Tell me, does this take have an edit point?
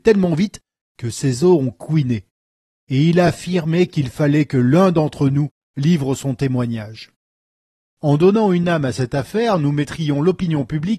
no; 0 cuts

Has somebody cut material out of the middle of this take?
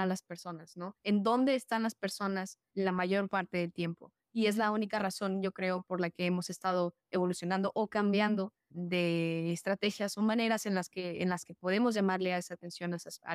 no; 0 cuts

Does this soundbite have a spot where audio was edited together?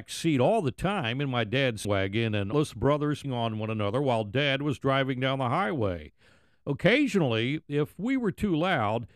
yes; 3 cuts; at 1.8 s, 2.5 s, 3.2 s

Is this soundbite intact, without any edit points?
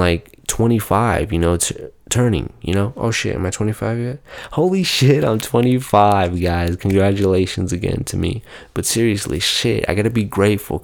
yes; 0 cuts

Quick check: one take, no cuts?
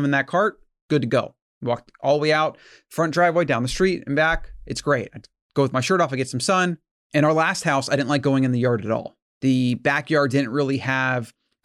yes; 0 cuts

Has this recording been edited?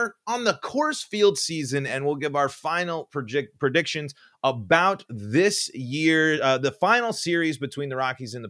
no; 0 cuts

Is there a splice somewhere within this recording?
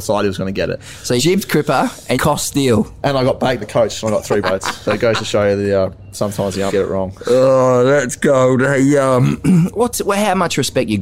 yes; 5 cuts; at 1.2 s, 2.1 s, 3.6 s, 4.4 s, 6.7 s

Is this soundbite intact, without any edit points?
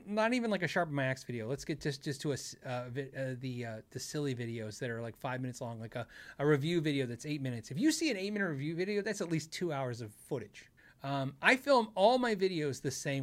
no; 1 cut; at 10.8 s

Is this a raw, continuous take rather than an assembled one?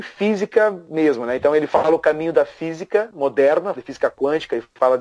no; 1 cut; at 3.7 s

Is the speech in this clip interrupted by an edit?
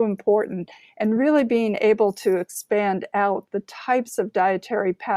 no; 0 cuts

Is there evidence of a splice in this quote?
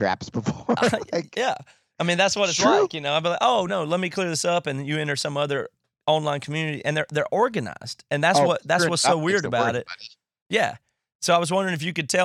yes; 1 cut; at 3.7 s

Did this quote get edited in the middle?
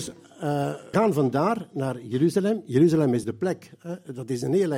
yes; 2 cuts; at 0.9 s, 3.2 s

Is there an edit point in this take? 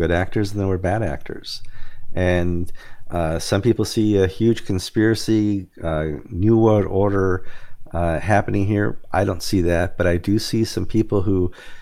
no; 0 cuts

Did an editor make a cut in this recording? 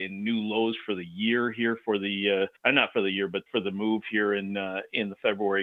yes; 2 cuts; at 2.6 s, 3.5 s

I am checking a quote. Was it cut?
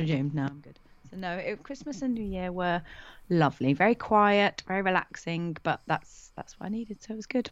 no; 0 cuts

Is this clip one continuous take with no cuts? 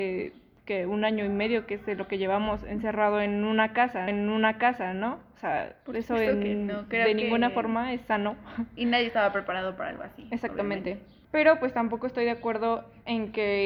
no; 2 cuts; at 4.1 s, 11.2 s

